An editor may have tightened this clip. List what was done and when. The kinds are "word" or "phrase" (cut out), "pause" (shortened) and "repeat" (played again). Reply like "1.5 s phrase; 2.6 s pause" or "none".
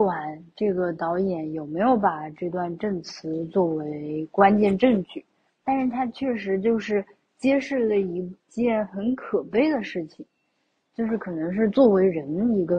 none